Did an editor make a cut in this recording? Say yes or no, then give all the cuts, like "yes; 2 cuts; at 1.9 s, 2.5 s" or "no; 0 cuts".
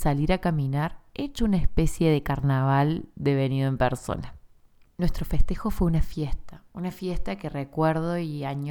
no; 0 cuts